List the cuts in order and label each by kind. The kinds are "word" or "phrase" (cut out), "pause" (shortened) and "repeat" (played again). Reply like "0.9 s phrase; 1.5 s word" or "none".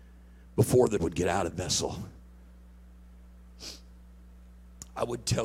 1.0 s word; 1.5 s word